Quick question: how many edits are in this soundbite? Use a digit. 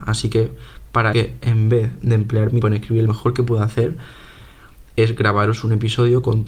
3